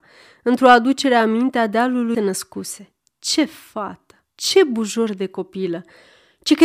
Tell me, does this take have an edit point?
yes; 3 cuts; at 2.1 s, 3.0 s, 4.3 s

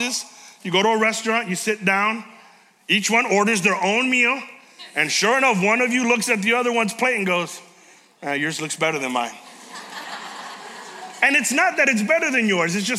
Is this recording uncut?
yes; 0 cuts

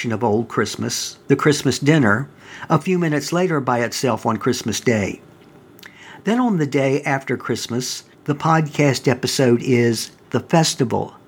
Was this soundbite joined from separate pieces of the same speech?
yes; 2 cuts; at 1.2 s, 8.1 s

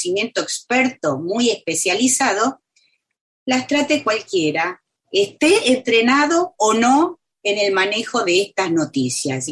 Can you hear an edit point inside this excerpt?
no; 0 cuts

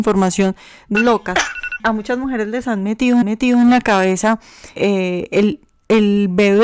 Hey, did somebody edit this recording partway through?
yes; 4 cuts; at 0.9 s, 1.8 s, 3.2 s, 4.8 s

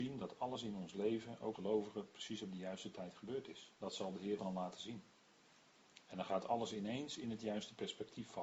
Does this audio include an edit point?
yes; 3 cuts; at 1.5 s, 3.7 s, 4.4 s

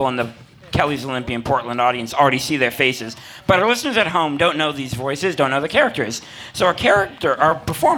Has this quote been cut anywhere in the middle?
no; 0 cuts

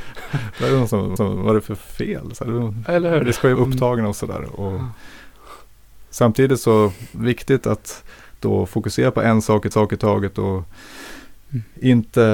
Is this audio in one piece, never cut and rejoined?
no; 3 cuts; at 1.2 s, 3.5 s, 9.7 s

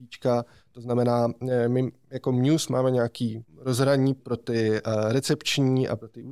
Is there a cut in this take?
yes; 1 cut; at 3.5 s

